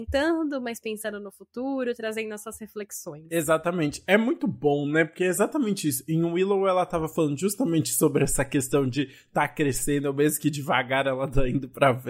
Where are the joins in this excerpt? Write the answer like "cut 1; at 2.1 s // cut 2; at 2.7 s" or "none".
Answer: none